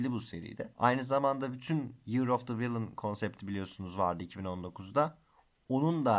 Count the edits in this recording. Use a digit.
0